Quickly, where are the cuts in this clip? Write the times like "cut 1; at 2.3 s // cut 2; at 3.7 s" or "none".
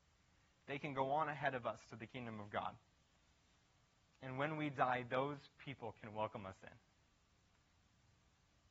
none